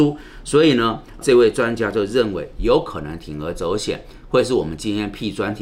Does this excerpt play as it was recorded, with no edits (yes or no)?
no